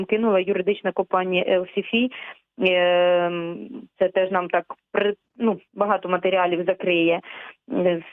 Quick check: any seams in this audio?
yes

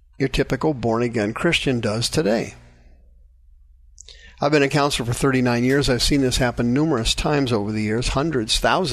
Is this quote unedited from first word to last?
yes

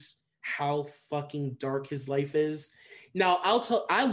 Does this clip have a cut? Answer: no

